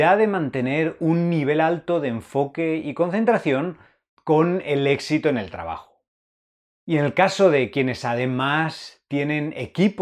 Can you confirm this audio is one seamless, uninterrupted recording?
yes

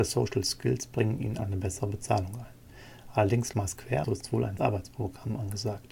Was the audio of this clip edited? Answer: yes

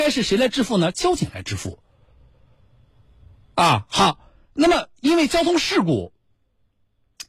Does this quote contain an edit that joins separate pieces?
no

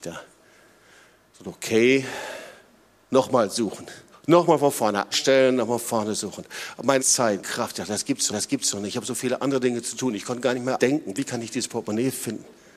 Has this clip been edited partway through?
yes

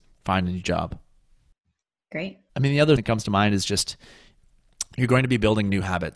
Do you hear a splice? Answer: yes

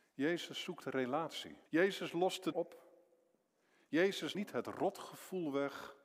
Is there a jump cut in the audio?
yes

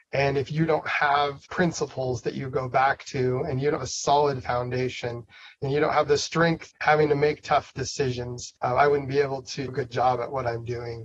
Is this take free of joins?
no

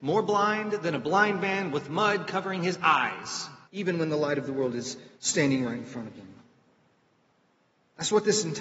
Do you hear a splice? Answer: yes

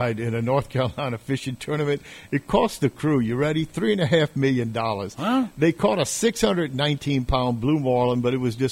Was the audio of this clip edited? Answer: no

